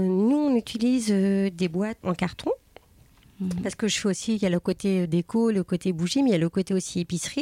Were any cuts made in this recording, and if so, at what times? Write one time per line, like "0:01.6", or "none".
0:02.0